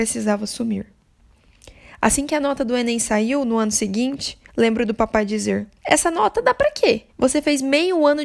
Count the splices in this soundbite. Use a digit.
3